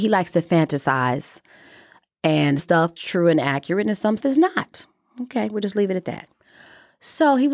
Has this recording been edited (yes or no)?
yes